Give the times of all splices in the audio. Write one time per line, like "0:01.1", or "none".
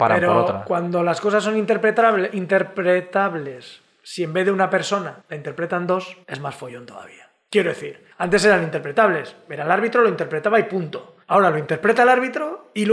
0:05.2
0:06.2
0:08.1
0:11.2